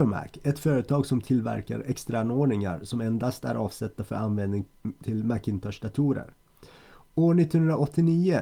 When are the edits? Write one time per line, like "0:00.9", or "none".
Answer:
none